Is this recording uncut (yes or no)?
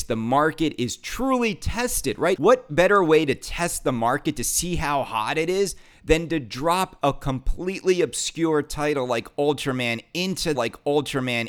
no